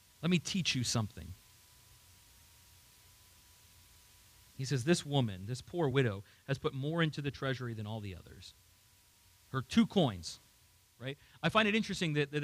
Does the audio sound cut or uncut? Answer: uncut